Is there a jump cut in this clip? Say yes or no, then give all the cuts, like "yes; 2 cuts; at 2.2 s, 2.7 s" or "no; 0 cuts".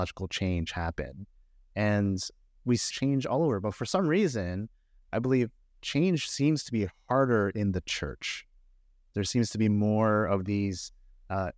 yes; 1 cut; at 2.9 s